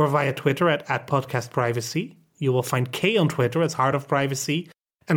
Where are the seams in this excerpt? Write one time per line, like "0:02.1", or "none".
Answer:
none

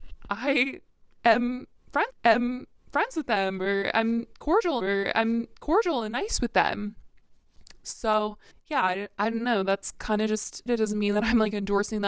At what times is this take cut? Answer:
0:02.1
0:04.8
0:08.5
0:10.7

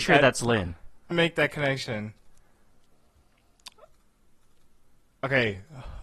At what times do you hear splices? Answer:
0:01.1

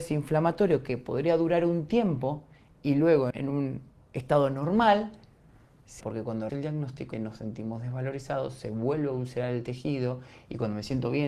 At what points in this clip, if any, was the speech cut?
0:03.3
0:06.0
0:06.5
0:07.1

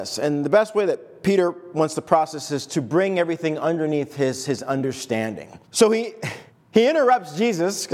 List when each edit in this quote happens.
0:05.6
0:06.5

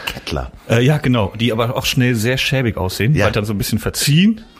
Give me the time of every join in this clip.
0:03.3

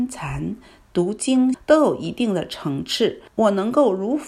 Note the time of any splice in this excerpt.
0:01.5
0:03.3

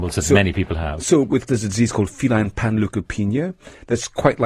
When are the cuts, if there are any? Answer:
0:01.5

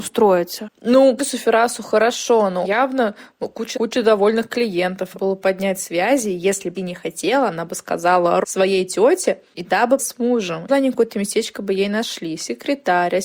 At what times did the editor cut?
0:01.2
0:02.6
0:03.7
0:05.1
0:06.7
0:08.4
0:10.0
0:10.7

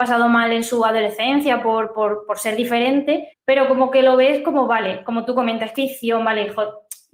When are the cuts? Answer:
0:03.3
0:05.7

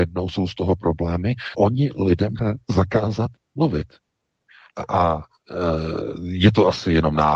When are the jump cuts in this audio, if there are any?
0:01.5
0:02.4

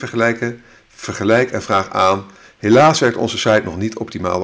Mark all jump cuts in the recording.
none

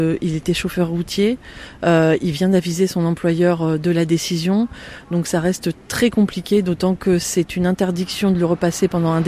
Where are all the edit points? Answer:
none

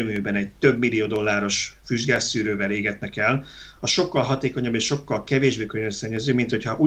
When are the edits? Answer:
none

